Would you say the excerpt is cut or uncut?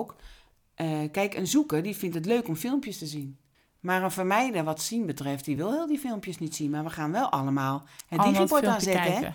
uncut